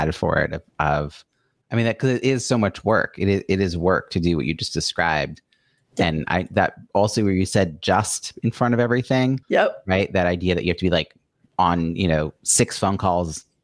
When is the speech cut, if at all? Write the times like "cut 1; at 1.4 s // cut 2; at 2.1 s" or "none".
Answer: cut 1; at 9.4 s